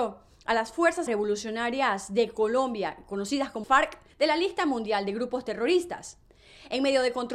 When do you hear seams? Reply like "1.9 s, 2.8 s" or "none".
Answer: 1.1 s, 3.6 s, 4.1 s